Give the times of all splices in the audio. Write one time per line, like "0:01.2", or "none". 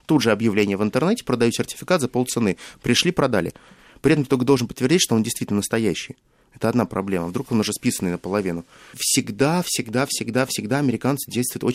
none